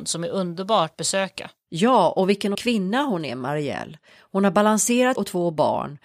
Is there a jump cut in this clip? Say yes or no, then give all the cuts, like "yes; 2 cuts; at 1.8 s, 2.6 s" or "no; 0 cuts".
yes; 3 cuts; at 0.9 s, 2.5 s, 5.2 s